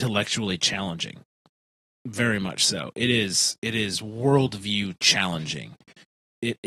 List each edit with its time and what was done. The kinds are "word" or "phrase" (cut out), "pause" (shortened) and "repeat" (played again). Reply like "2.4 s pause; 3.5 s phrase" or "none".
1.6 s pause